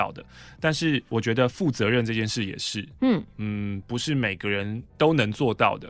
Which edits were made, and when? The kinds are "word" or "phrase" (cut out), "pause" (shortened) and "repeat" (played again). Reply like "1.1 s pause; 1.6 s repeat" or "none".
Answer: 1.1 s pause